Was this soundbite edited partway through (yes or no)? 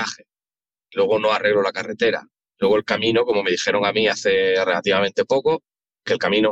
no